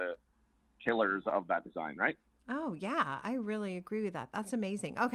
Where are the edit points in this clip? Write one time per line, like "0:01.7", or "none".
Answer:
none